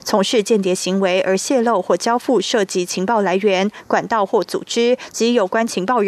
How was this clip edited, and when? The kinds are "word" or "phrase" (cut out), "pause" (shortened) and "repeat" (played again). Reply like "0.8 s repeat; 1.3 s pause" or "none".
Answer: none